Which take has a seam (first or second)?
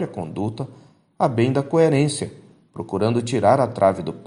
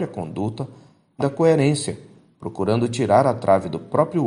second